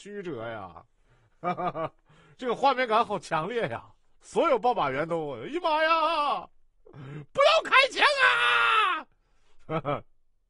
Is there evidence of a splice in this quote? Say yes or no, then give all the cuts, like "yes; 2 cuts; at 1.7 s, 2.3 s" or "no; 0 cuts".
no; 0 cuts